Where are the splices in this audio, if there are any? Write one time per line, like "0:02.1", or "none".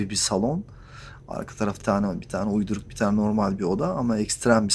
0:01.8